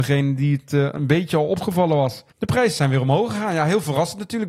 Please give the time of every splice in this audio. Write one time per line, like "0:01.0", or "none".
0:02.3